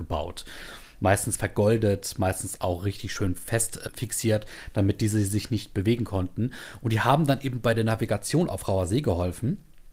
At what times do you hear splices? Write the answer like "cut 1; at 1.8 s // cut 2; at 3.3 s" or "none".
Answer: none